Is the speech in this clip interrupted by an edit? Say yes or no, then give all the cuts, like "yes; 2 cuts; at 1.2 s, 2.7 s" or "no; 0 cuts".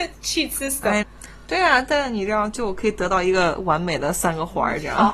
yes; 1 cut; at 1.0 s